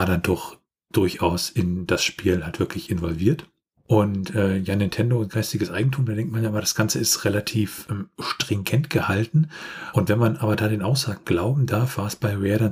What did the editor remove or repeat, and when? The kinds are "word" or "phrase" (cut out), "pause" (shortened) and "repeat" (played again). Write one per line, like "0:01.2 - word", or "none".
none